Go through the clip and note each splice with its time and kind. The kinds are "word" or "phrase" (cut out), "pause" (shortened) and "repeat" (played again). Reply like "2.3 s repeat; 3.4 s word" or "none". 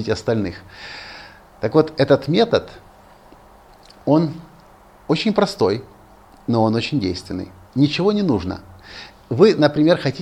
none

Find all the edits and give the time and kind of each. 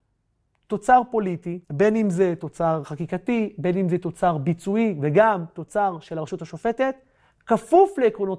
1.6 s pause

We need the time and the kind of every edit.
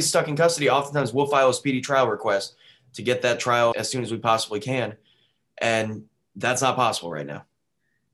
3.7 s word

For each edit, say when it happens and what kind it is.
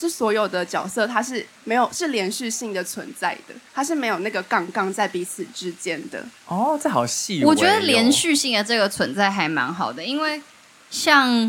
3.7 s pause

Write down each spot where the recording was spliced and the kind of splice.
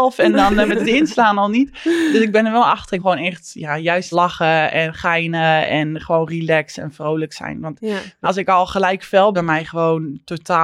3.0 s word; 4.1 s word; 8.2 s word; 9.3 s phrase

